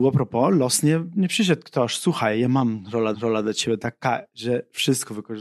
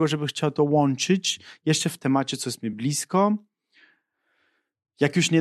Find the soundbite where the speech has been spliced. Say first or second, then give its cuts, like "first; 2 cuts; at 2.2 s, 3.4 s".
first; 1 cut; at 3.1 s